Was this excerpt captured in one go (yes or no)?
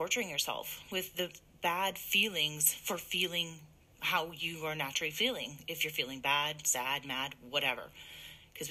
yes